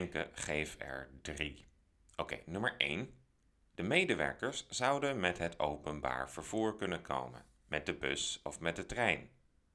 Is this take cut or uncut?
uncut